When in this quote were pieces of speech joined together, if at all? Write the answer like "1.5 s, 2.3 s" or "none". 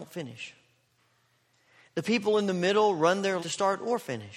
3.4 s